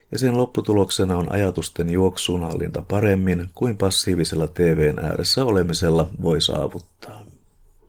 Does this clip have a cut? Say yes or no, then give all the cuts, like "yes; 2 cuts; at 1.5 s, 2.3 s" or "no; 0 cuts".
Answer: no; 0 cuts